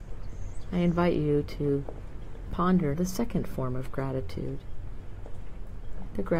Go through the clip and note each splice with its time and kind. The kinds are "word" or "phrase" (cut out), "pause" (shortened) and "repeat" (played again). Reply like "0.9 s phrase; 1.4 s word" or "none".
2.9 s word